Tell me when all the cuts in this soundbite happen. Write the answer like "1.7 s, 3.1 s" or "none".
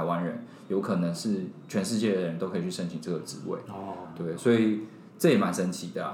none